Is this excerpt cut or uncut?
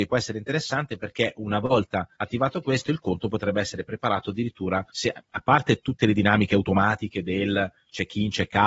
cut